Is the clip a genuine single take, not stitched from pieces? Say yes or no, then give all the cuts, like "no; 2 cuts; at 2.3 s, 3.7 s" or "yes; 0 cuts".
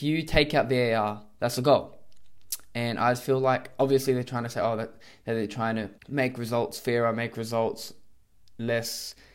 no; 1 cut; at 6.0 s